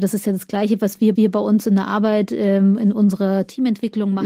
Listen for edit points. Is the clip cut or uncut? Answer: cut